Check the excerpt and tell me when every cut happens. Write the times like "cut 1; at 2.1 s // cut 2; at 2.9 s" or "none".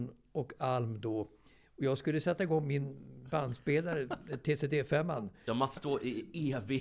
none

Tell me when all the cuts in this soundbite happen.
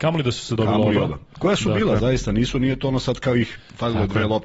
none

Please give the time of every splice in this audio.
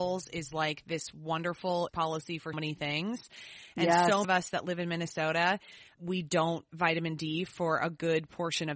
cut 1; at 1.9 s // cut 2; at 2.5 s // cut 3; at 4.2 s // cut 4; at 6.7 s

